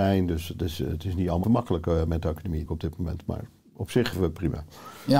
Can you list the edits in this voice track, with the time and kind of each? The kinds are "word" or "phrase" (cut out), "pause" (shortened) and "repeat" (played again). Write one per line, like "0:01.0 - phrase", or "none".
0:01.4 - word
0:02.7 - word
0:04.1 - word

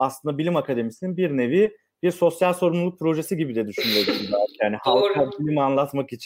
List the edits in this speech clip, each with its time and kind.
none

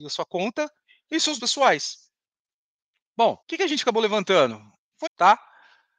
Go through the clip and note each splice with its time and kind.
0:01.4 - word
0:03.4 - pause
0:05.1 - word

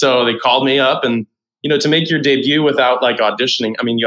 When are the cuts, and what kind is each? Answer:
none

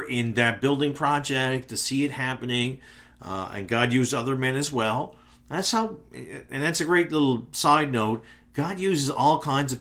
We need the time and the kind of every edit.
none

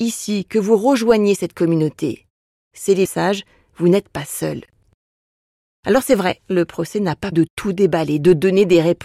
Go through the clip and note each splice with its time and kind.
0:03.0 - word
0:07.3 - word

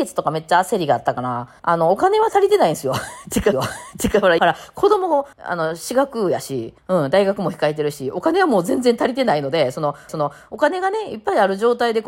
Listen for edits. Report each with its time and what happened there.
0:01.6 - pause
0:03.5 - repeat
0:04.4 - word
0:05.3 - pause
0:06.8 - pause
0:10.1 - repeat

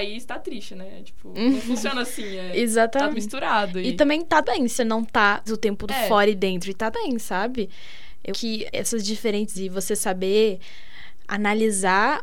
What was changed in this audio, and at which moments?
0:03.1 - word
0:04.4 - word
0:04.8 - word
0:05.5 - word
0:05.9 - word
0:06.9 - word
0:08.3 - word
0:08.7 - word
0:09.5 - word

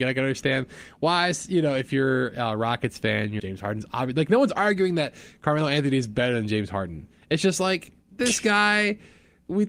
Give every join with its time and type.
0:03.4 - word
0:08.0 - pause

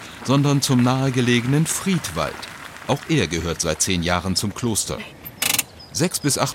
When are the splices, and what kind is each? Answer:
none

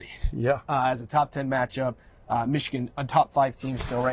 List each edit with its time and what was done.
none

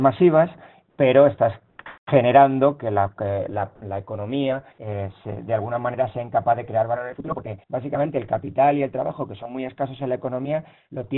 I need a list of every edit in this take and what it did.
0:02.0 - pause
0:04.7 - pause
0:07.6 - pause

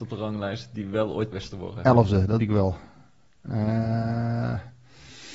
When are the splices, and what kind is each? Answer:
0:01.3 - word
0:02.4 - word

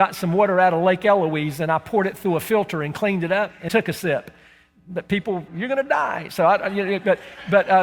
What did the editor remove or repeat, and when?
0:03.7 - word
0:05.5 - word

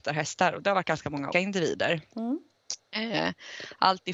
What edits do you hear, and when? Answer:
0:01.3 - word

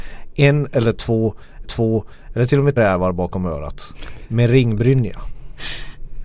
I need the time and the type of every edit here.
0:01.6 - repeat
0:02.8 - word

